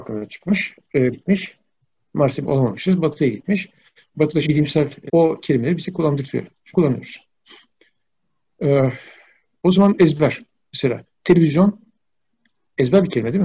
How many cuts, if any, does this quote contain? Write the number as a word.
six